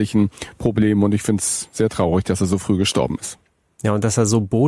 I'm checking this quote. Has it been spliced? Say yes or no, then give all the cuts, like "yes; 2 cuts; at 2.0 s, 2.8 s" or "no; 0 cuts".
no; 0 cuts